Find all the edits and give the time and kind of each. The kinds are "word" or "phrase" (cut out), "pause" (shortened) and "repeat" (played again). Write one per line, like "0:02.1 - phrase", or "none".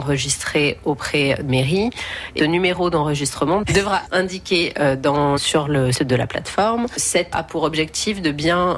0:01.5 - word
0:02.4 - word
0:04.1 - word
0:05.4 - word
0:05.9 - word
0:07.3 - word